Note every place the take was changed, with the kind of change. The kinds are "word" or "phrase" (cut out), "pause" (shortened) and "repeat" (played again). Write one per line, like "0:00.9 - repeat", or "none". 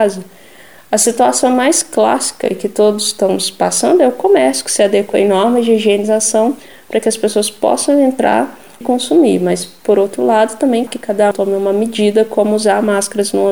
0:08.8 - word
0:10.9 - word
0:11.3 - word